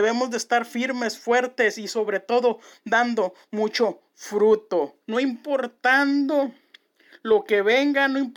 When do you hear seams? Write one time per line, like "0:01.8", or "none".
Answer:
0:05.0